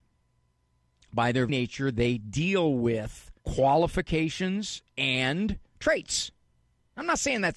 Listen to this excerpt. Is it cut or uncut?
cut